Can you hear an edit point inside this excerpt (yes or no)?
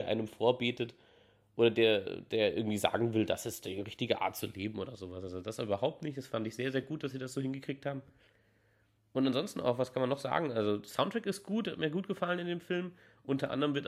no